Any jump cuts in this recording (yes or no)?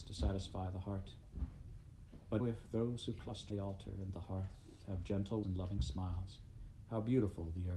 yes